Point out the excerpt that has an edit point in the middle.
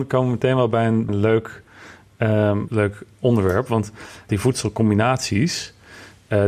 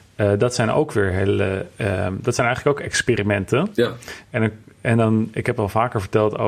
first; 3 cuts; at 1.1 s, 2.7 s, 4.3 s

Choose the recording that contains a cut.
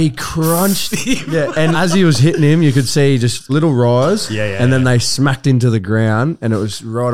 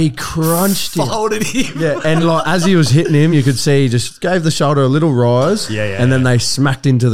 first; 3 cuts; at 0.9 s, 1.7 s, 3.5 s

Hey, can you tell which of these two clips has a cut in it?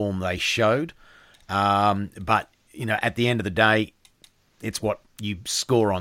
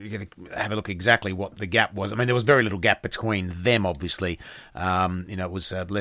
second; 1 cut; at 1.6 s

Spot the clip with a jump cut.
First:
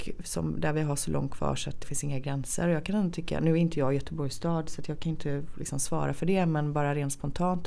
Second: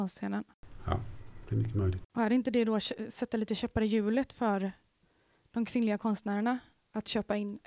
first; 1 cut; at 1.8 s

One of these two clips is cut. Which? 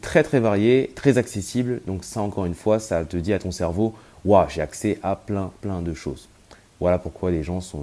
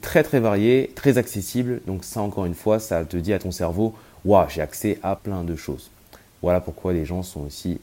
second; 1 cut; at 5.2 s

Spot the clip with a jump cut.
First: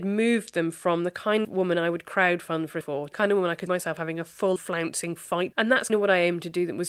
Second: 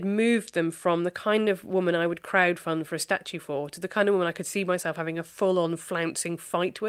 first; 7 cuts; at 1.4 s, 2.8 s, 3.1 s, 3.7 s, 4.6 s, 5.5 s, 5.9 s

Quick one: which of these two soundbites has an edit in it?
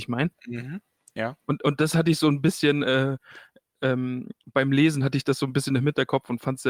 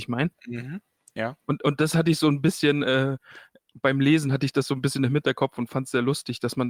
second; 1 cut; at 3.7 s

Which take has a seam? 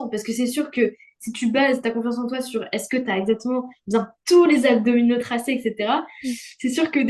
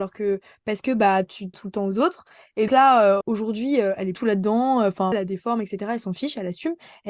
second; 5 cuts; at 1.5 s, 2.7 s, 3.2 s, 4.1 s, 5.1 s

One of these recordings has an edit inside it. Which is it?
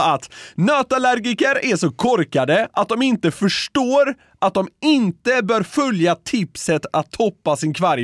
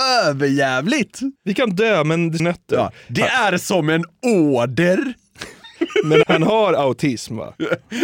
second; 3 cuts; at 1.4 s, 2.4 s, 6.2 s

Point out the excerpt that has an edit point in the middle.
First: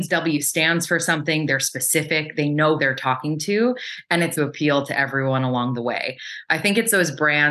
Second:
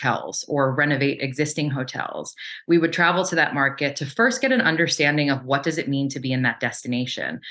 first; 2 cuts; at 2.8 s, 4.4 s

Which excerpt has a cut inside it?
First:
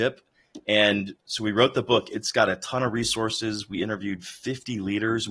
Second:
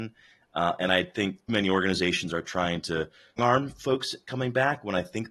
second; 2 cuts; at 1.5 s, 3.4 s

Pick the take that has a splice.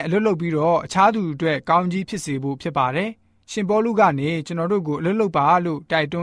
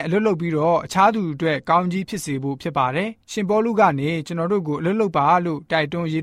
second; 1 cut; at 3.2 s

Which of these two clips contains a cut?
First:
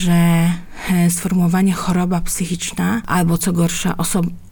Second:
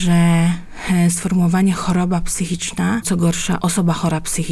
second; 2 cuts; at 3.0 s, 3.6 s

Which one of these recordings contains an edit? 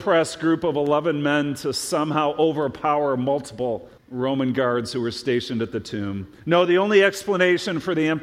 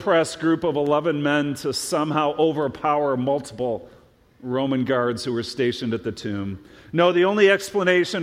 first; 2 cuts; at 4.0 s, 6.4 s

